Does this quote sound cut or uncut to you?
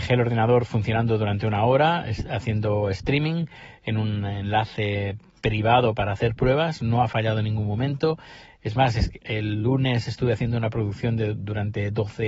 cut